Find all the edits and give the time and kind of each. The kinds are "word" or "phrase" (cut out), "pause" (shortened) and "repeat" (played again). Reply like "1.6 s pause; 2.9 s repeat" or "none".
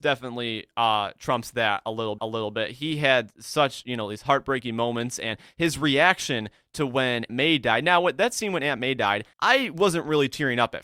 2.2 s repeat; 7.3 s word; 9.3 s pause